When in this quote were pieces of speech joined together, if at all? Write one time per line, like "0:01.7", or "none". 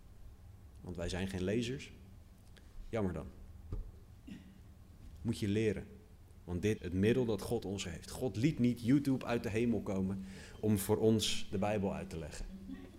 0:06.8
0:07.8